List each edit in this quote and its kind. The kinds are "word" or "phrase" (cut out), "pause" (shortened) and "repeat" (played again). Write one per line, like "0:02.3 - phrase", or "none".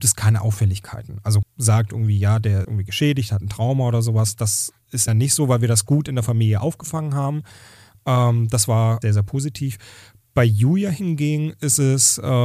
0:01.4 - word
0:02.6 - word
0:05.1 - word
0:09.0 - word

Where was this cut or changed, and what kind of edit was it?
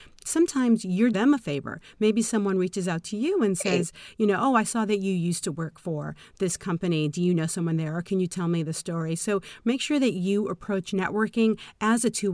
0:01.1 - word

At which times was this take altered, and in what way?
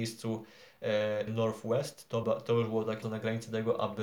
0:01.3 - word
0:02.2 - word
0:03.0 - word

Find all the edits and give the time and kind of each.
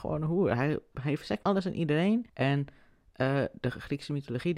0:01.4 - word
0:02.3 - pause

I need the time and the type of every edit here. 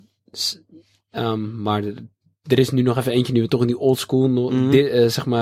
none

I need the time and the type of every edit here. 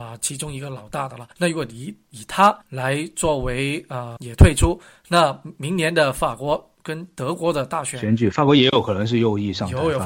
0:01.3 - pause
0:02.6 - pause
0:04.2 - word

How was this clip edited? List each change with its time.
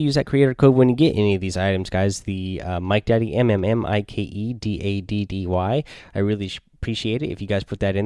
none

